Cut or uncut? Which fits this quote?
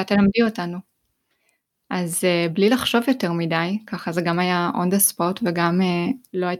uncut